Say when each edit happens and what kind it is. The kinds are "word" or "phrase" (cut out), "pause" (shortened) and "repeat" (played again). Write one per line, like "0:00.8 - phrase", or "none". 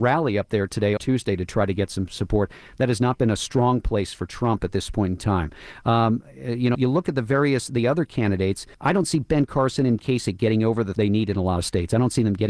0:01.0 - phrase
0:06.7 - word
0:08.7 - pause
0:10.0 - word
0:10.9 - word